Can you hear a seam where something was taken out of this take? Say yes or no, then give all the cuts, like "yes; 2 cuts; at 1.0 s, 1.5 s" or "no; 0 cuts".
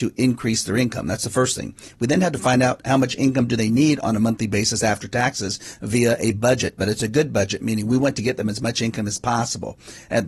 no; 0 cuts